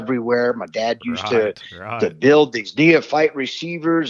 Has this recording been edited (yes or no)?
no